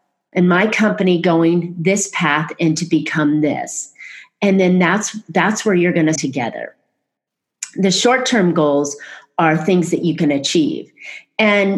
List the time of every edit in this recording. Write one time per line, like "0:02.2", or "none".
0:06.2